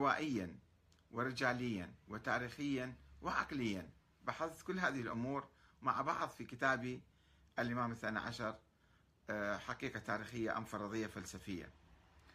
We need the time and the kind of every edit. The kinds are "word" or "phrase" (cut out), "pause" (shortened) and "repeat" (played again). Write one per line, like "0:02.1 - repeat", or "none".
none